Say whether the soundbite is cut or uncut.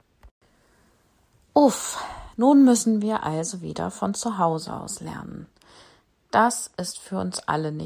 uncut